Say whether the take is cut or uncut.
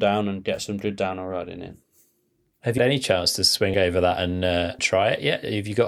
cut